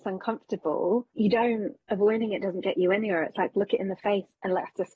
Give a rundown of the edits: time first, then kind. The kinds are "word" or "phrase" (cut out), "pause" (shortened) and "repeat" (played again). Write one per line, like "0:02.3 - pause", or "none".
0:01.2 - word